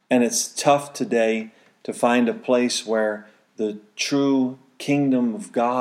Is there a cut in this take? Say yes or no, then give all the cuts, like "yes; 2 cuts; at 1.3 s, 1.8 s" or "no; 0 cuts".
no; 0 cuts